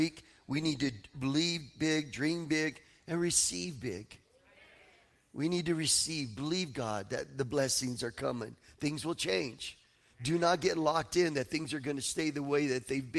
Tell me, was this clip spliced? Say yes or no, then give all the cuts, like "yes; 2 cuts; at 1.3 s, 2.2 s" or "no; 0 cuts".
no; 0 cuts